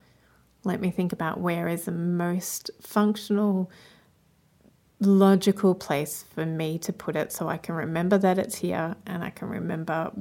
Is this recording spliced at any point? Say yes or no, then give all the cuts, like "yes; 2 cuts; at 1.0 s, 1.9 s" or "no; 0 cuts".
no; 0 cuts